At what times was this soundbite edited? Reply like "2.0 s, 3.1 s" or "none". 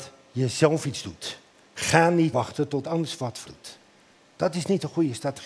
2.3 s, 2.8 s, 3.5 s